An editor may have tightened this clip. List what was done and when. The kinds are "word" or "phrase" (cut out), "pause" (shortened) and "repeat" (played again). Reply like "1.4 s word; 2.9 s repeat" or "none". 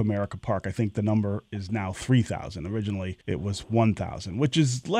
3.2 s pause